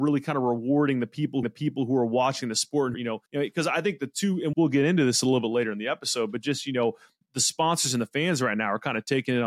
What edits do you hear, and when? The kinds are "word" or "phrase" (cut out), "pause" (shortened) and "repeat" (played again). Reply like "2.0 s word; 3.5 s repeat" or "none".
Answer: 1.4 s repeat; 2.9 s phrase; 3.3 s pause; 4.5 s word; 7.2 s word